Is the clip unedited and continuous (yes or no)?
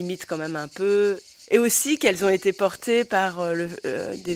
yes